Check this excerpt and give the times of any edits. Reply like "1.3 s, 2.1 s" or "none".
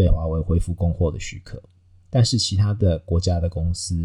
none